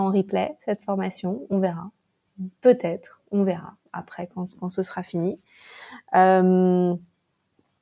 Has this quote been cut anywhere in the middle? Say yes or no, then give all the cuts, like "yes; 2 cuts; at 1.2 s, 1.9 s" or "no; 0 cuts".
no; 0 cuts